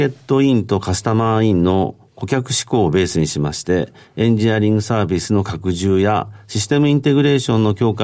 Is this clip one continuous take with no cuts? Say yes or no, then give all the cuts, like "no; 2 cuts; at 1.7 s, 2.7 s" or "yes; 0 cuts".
yes; 0 cuts